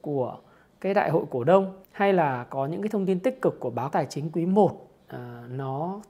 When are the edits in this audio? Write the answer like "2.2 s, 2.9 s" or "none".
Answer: 1.8 s, 3.9 s